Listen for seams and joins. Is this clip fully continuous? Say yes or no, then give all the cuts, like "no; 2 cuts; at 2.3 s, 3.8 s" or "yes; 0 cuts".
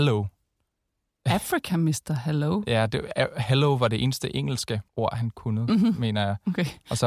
no; 1 cut; at 4.9 s